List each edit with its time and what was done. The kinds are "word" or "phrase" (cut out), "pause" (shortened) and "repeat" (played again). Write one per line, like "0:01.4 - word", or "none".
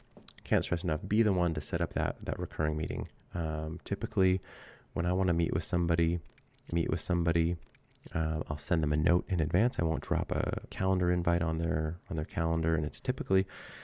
0:06.7 - repeat
0:10.0 - word
0:10.7 - phrase